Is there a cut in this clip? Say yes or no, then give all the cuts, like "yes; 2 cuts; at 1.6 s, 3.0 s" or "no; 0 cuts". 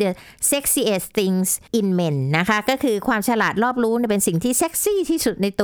yes; 1 cut; at 1.7 s